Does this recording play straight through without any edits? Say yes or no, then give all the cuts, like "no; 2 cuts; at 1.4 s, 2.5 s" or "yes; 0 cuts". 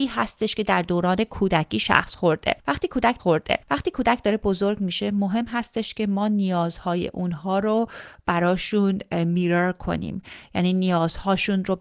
no; 1 cut; at 3.2 s